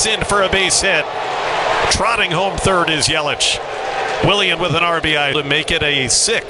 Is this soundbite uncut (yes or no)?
no